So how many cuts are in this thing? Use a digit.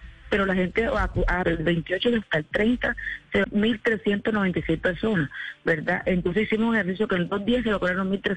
3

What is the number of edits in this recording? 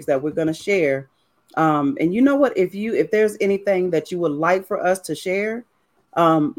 0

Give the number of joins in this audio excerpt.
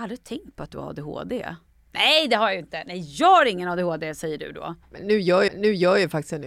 3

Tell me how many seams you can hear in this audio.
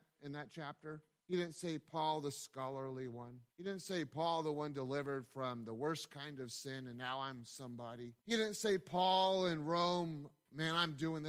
3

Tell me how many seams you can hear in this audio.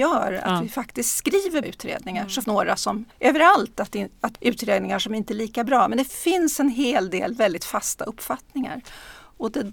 4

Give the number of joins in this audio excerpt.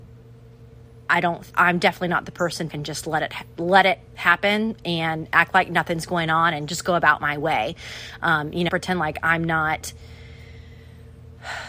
4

